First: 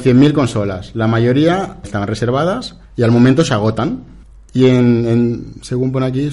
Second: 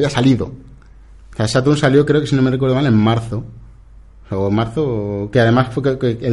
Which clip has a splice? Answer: first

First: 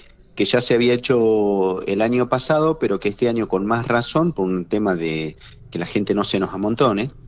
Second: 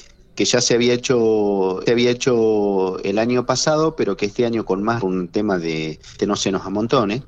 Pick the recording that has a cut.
second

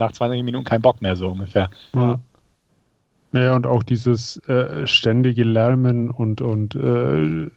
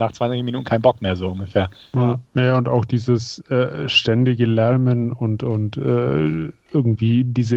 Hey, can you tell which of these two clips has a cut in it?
second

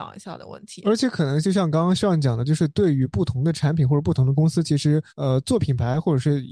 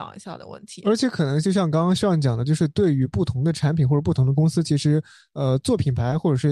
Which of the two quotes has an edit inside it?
first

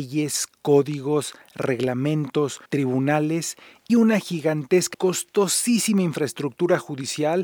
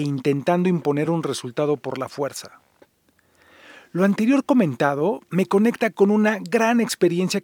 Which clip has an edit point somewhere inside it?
first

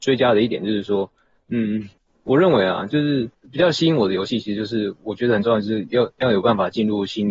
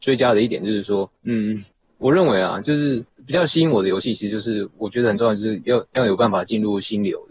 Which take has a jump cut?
second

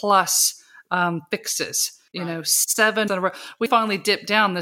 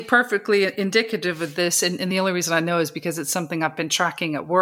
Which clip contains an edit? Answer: first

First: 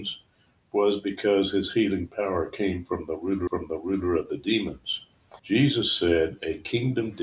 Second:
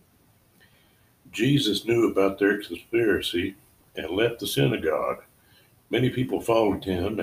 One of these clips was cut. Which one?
first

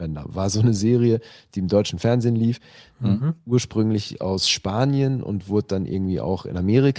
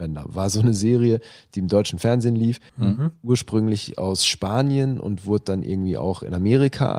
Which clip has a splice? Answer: second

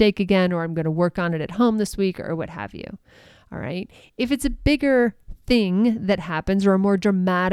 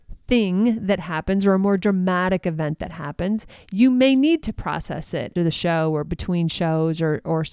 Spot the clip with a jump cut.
second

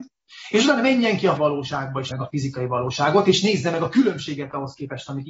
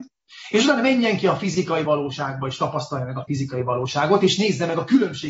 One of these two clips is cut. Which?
first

